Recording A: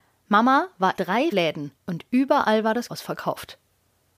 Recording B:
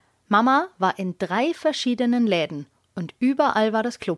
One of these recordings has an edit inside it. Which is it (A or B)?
A